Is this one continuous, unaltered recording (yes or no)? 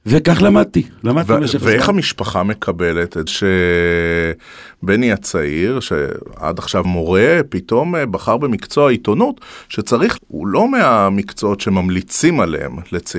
no